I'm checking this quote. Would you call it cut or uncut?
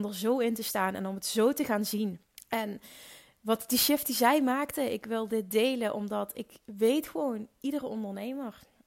cut